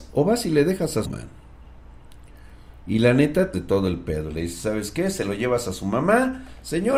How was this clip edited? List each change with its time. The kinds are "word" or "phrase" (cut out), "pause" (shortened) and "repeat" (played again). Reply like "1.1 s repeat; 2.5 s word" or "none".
1.0 s phrase; 3.5 s phrase